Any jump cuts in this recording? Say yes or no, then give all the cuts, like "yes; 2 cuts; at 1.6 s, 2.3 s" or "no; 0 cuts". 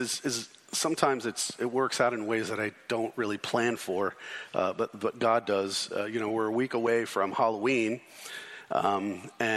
no; 0 cuts